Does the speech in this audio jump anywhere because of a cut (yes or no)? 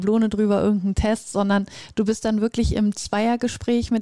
no